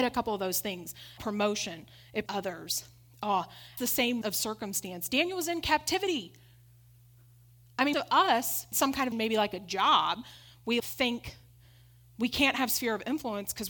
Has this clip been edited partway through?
yes; 8 cuts; at 1.2 s, 2.3 s, 3.8 s, 4.2 s, 7.9 s, 8.7 s, 9.1 s, 10.8 s

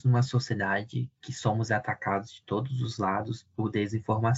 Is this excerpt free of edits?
yes; 0 cuts

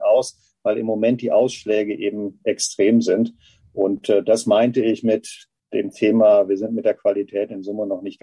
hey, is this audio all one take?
yes; 0 cuts

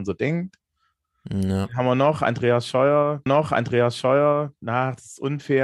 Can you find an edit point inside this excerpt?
yes; 1 cut; at 3.3 s

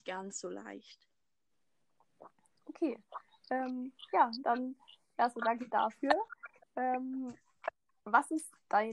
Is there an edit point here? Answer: no; 0 cuts

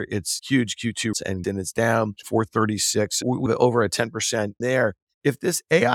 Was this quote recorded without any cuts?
no; 5 cuts; at 1.1 s, 1.4 s, 2.2 s, 3.5 s, 4.6 s

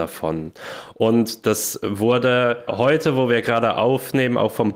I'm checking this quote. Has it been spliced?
yes; 1 cut; at 2.7 s

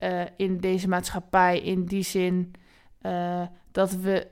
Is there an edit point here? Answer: no; 0 cuts

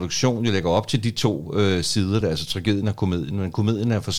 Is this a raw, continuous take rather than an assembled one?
yes; 0 cuts

